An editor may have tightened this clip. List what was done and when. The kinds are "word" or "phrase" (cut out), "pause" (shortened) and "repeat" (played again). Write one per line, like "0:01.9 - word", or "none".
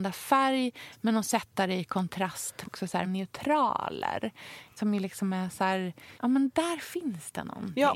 0:02.6 - word
0:03.0 - word
0:06.2 - pause